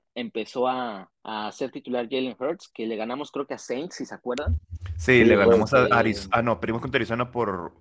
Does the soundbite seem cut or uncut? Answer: cut